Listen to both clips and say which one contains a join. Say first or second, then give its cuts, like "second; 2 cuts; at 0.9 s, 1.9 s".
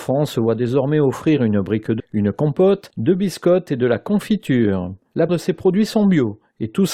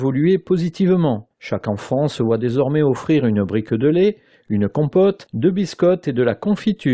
first; 2 cuts; at 2.0 s, 5.3 s